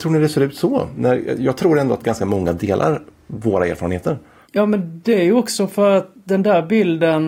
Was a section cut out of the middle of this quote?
no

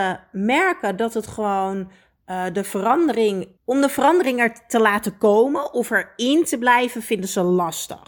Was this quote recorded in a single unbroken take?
no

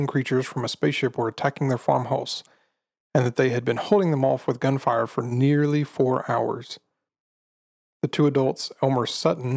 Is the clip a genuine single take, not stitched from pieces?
yes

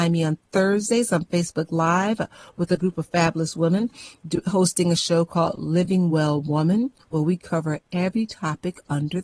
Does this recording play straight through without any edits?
yes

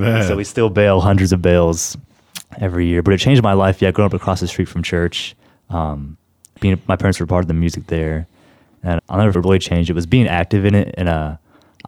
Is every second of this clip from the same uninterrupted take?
no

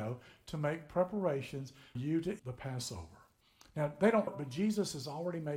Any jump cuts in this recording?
yes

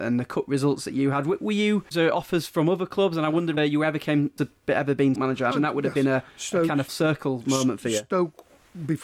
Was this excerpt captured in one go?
no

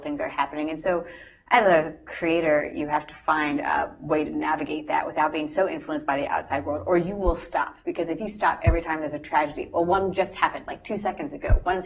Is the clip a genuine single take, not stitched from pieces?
yes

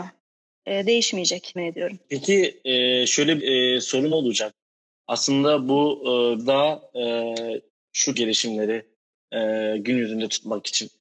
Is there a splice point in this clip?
yes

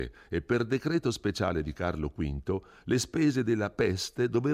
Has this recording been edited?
no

